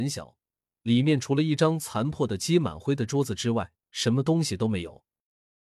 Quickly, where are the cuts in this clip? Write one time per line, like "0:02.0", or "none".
0:03.8